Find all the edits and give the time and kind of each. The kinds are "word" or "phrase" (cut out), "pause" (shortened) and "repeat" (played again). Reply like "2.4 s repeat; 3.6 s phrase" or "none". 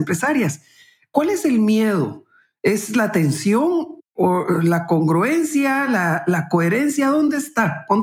none